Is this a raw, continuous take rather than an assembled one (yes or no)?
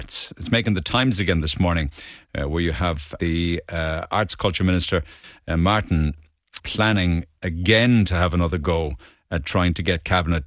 no